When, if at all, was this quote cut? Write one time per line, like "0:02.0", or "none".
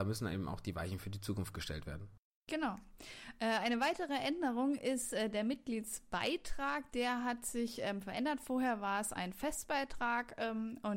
none